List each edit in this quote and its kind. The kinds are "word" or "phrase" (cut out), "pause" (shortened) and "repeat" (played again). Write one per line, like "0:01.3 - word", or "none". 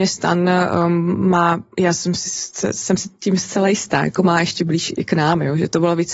0:01.7 - pause

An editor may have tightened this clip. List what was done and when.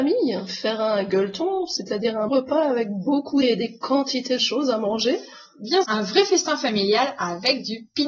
0:02.3 - word
0:03.4 - word
0:04.4 - phrase
0:05.8 - word

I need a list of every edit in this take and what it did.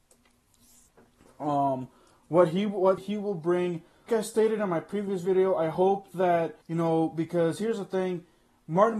0:03.0 - word
0:04.1 - word
0:06.6 - pause

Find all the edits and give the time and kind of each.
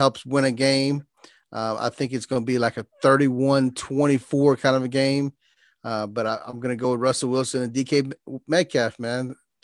none

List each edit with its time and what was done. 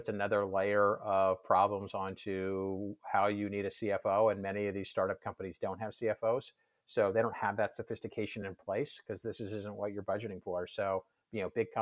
none

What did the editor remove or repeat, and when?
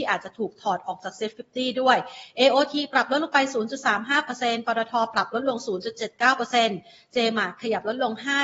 none

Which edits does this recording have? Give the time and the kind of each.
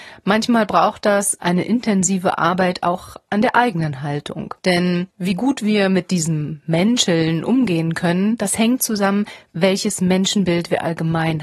0:04.6 - pause
0:08.8 - phrase

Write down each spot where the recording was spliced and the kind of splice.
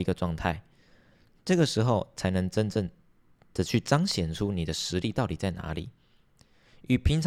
none

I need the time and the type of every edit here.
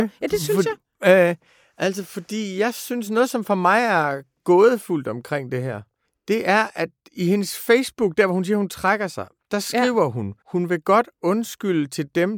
0:06.0 - pause
0:10.4 - pause

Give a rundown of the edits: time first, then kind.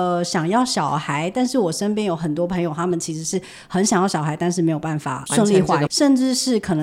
0:05.9 - phrase

